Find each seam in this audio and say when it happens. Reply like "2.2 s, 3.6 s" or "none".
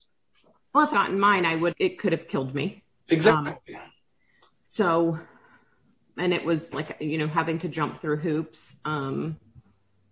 0.9 s, 1.7 s, 6.7 s